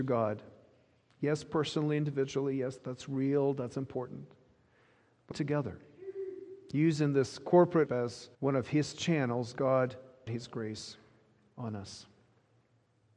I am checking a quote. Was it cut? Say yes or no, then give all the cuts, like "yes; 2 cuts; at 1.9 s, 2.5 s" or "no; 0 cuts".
yes; 5 cuts; at 2.8 s, 5.3 s, 7.9 s, 8.3 s, 10.3 s